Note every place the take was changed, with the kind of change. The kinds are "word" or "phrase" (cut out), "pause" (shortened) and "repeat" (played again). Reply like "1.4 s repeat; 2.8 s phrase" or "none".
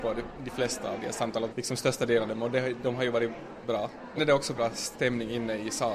1.5 s word; 2.3 s word; 3.6 s word; 4.2 s word; 4.5 s word